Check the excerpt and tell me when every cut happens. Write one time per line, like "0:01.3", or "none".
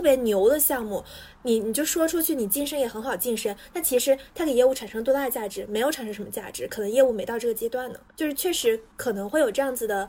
0:08.1
0:08.9